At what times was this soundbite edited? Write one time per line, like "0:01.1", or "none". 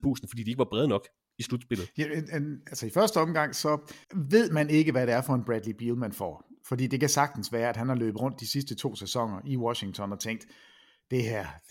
0:04.0